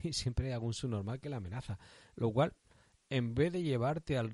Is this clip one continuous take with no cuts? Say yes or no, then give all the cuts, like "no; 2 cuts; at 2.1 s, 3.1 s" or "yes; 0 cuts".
yes; 0 cuts